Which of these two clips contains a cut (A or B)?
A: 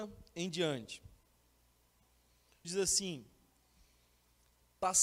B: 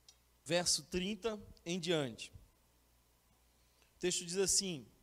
A